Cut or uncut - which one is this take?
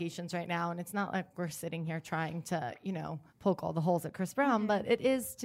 cut